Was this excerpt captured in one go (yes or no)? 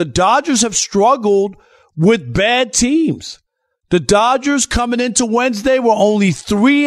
yes